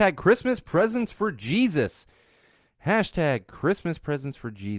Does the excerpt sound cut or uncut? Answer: uncut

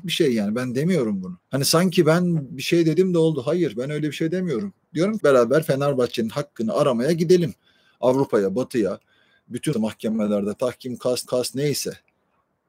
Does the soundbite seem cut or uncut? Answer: cut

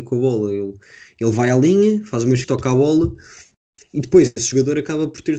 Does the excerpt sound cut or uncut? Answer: cut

